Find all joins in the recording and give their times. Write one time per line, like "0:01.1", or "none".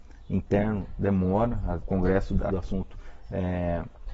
0:01.8
0:02.5